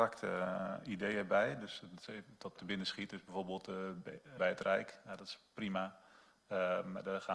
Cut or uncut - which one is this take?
cut